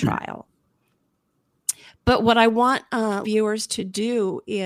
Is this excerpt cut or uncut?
cut